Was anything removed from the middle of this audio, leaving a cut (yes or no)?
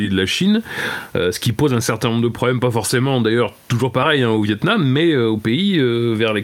no